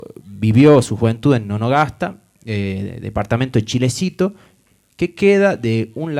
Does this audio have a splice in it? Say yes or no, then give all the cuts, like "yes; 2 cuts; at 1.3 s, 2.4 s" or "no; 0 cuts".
no; 0 cuts